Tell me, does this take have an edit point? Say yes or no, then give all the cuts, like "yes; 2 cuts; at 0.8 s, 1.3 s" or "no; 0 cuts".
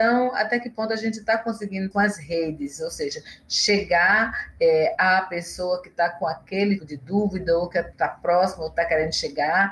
yes; 2 cuts; at 1.9 s, 6.8 s